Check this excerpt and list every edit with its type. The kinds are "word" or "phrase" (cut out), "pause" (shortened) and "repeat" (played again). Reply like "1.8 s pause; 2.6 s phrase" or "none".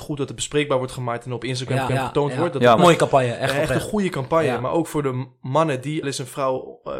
1.9 s repeat; 2.8 s word; 6.0 s phrase